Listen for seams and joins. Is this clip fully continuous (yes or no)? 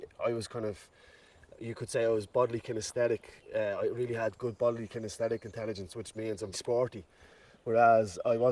no